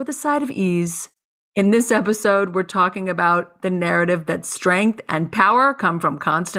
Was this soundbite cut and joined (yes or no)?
no